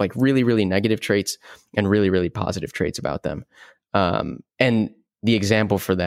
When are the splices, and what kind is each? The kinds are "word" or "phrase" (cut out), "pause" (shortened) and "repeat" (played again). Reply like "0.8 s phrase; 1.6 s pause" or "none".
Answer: 4.5 s pause